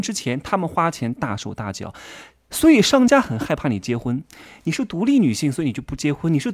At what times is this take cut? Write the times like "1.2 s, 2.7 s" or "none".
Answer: none